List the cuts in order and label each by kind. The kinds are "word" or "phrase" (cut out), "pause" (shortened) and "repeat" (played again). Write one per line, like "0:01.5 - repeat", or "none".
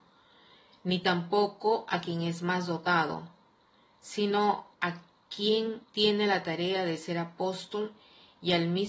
0:04.7 - pause
0:05.8 - pause